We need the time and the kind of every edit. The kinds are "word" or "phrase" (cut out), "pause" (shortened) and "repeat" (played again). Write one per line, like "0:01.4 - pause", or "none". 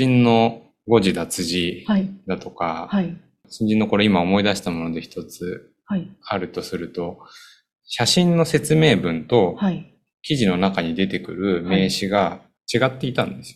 none

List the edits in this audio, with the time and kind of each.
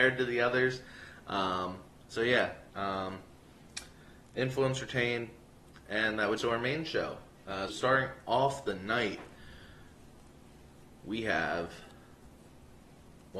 0:01.9 - pause
0:02.7 - pause
0:06.4 - phrase
0:07.7 - word

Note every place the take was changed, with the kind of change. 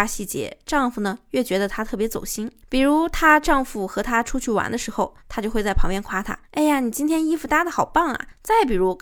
0:05.2 - pause
0:06.4 - pause

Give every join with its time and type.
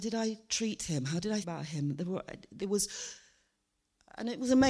0:01.4 - word
0:02.6 - word

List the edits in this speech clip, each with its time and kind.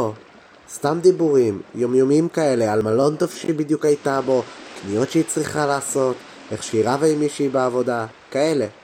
none

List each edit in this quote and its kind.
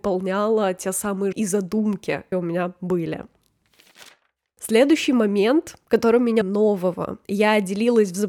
0:01.3 - word
0:02.3 - word
0:05.9 - pause
0:06.4 - phrase

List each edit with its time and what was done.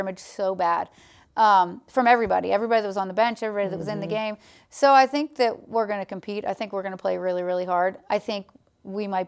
none

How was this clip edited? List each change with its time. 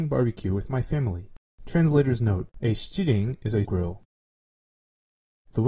0:01.4 - pause
0:02.5 - pause
0:03.6 - phrase

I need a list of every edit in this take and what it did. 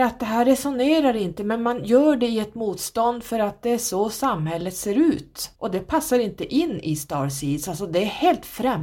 0:05.6 - pause

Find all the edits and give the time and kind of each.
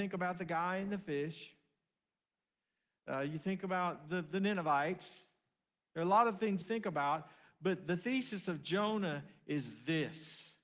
0:06.6 - word

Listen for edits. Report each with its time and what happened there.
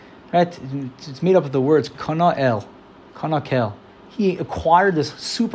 none

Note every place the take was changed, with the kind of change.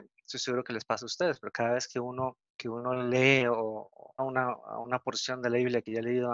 0:02.5 - pause
0:04.2 - word

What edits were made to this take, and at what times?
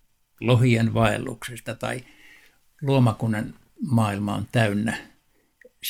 none

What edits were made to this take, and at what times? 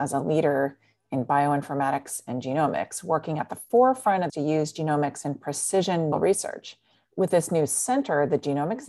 0:04.3 - word
0:06.1 - phrase

